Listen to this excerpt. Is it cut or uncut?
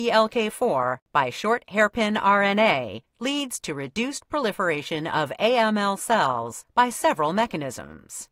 uncut